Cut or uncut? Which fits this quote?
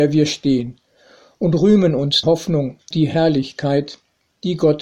cut